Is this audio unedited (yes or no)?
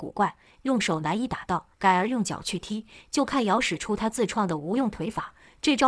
no